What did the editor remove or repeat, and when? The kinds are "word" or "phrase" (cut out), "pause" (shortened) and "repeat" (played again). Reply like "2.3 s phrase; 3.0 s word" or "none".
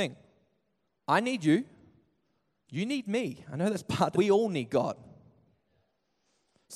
4.1 s phrase